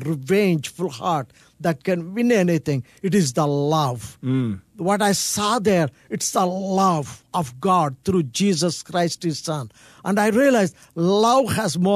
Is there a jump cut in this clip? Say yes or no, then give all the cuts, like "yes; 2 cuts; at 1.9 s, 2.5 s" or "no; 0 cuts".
no; 0 cuts